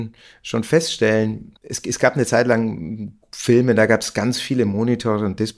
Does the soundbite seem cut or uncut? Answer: uncut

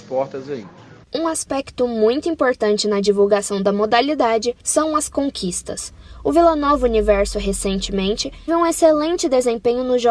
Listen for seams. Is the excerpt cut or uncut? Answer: cut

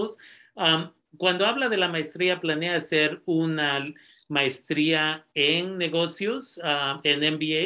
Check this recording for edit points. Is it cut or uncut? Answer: uncut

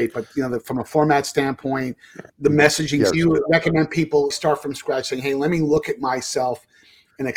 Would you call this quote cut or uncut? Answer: cut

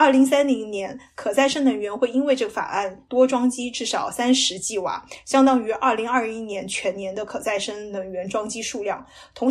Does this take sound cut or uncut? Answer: uncut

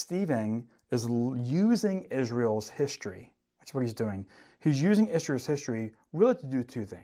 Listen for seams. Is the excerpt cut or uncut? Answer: uncut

